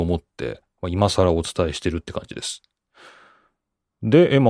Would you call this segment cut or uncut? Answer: uncut